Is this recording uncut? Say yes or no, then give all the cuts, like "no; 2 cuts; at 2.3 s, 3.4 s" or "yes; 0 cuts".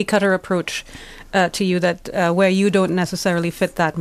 yes; 0 cuts